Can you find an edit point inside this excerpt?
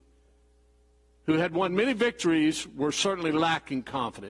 no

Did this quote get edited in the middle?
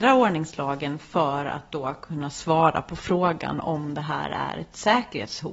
no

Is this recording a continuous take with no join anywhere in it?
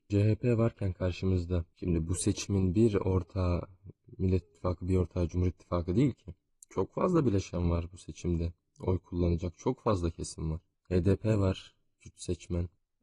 yes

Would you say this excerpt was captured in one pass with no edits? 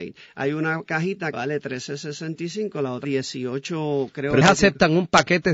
no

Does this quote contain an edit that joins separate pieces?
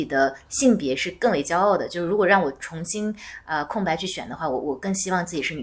no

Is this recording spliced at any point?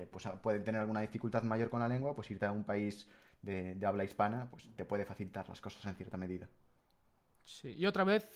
no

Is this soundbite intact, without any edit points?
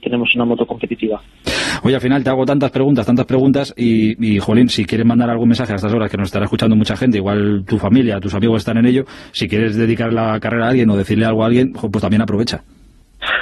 yes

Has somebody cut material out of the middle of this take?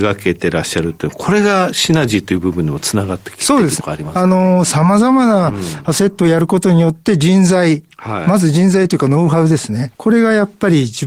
yes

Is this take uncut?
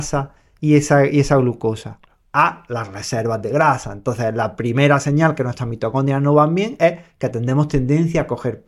yes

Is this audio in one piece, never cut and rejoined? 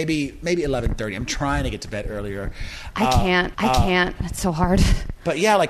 no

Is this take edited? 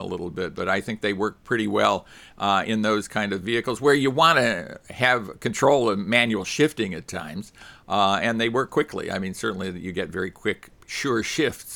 no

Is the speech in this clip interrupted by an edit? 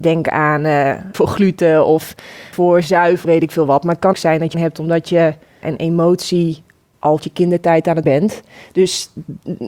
yes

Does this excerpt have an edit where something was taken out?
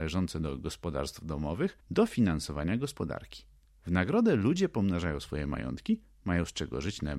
yes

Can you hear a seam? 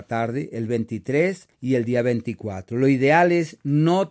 yes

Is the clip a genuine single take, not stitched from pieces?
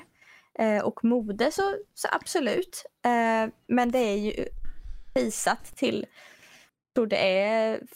yes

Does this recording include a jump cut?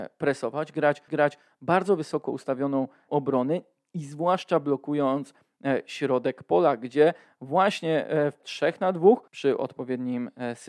yes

